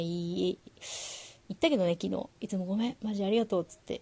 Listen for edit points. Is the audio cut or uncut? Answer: cut